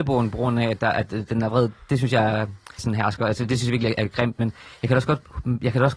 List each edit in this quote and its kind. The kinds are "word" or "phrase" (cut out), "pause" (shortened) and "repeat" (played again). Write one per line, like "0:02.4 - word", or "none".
0:02.8 - word